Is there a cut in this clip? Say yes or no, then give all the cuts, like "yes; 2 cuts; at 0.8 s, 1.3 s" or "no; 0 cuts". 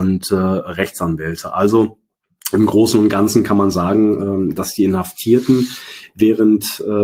no; 0 cuts